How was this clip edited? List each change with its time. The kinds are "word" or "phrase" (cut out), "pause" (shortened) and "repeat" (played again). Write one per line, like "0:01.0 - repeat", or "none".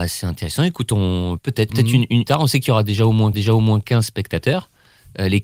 0:01.4 - word
0:01.7 - phrase
0:02.3 - phrase
0:03.3 - repeat